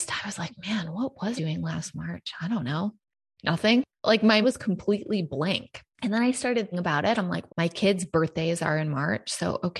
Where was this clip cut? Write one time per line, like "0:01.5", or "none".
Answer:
0:01.4
0:04.4
0:06.7
0:07.5

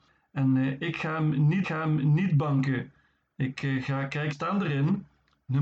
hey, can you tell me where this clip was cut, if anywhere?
0:01.6
0:04.3

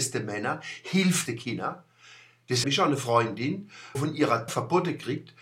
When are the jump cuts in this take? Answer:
0:01.3
0:02.6
0:03.9
0:04.5

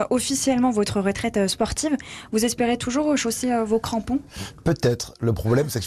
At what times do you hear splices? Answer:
none

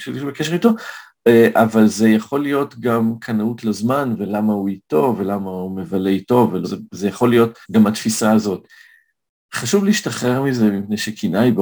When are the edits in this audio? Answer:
0:06.6
0:07.6

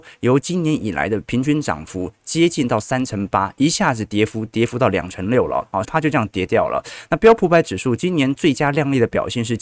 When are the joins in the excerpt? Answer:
0:05.8

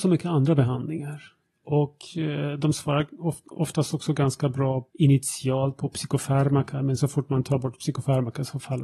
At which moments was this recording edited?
0:04.9

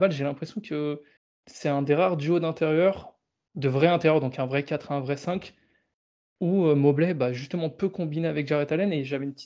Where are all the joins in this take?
0:01.2

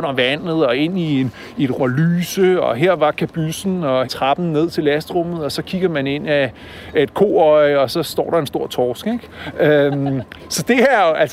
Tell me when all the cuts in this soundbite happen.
0:01.8
0:04.0

